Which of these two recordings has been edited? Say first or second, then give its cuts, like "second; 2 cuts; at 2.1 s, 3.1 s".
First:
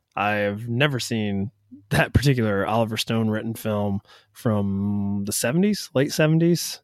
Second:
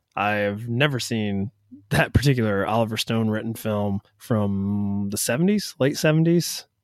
second; 1 cut; at 4.1 s